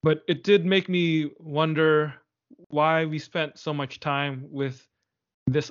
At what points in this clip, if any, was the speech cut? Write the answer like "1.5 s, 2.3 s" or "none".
none